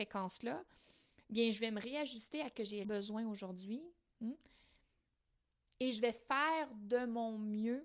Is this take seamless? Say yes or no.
no